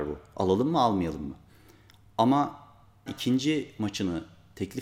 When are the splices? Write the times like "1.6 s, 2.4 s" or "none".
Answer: 3.1 s